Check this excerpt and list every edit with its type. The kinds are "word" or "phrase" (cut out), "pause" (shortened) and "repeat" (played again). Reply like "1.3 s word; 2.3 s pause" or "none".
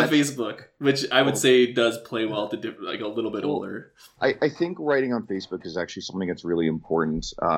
none